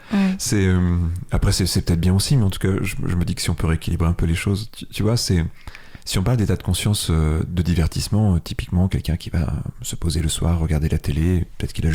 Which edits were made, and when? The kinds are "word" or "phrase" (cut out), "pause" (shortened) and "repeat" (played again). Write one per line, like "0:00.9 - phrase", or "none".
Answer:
none